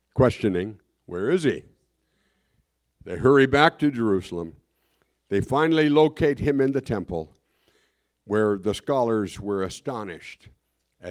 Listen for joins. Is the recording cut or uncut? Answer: uncut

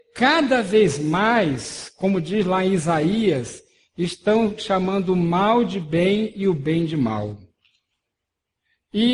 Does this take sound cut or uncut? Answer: uncut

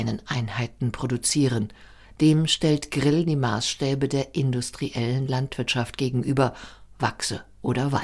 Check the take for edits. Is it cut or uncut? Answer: uncut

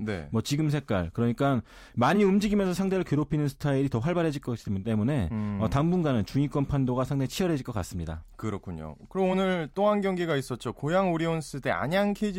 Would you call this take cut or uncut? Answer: uncut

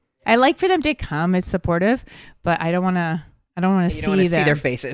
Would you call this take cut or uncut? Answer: uncut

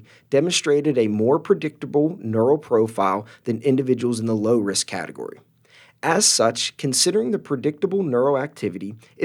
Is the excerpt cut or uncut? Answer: uncut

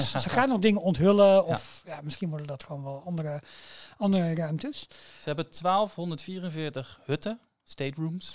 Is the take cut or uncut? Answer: uncut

